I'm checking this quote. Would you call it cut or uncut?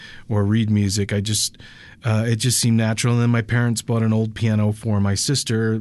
uncut